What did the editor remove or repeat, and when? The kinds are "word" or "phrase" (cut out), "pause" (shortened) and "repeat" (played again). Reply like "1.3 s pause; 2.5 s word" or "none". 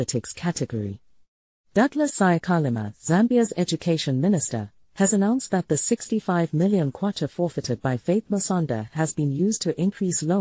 none